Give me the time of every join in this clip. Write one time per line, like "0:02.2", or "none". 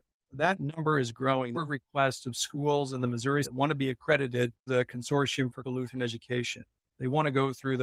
0:01.5
0:03.4
0:04.7
0:05.6

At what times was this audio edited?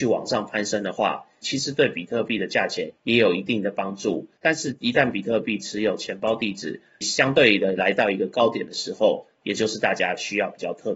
0:03.0

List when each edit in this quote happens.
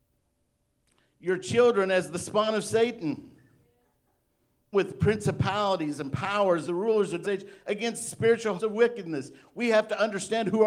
0:04.7
0:06.6
0:07.2
0:08.6

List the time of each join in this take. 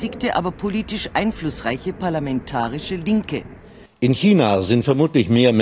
0:03.9

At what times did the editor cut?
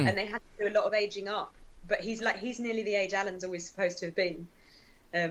0:02.2

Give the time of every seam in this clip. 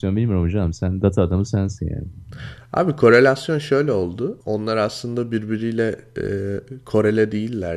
0:04.4

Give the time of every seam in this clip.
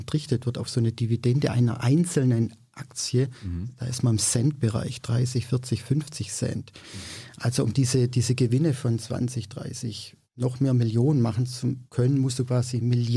0:10.2
0:11.9

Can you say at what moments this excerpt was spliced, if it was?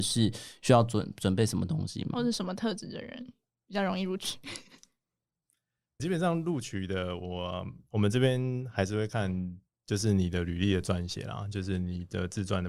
0:06.0

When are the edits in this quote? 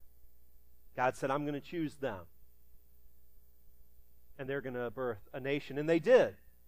none

